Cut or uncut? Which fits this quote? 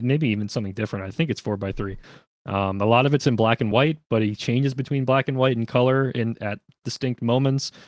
uncut